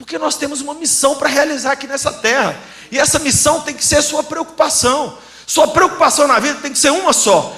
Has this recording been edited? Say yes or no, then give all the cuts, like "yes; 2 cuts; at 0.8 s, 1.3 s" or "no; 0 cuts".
no; 0 cuts